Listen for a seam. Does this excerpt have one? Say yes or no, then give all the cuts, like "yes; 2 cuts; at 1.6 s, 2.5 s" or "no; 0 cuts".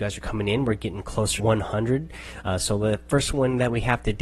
yes; 1 cut; at 1.4 s